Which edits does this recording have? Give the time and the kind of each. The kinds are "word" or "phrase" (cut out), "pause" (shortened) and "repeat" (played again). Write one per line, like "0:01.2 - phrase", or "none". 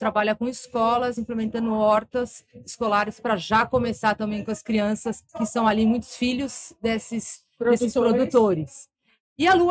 0:05.3 - pause